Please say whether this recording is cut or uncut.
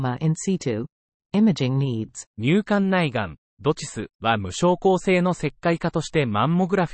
cut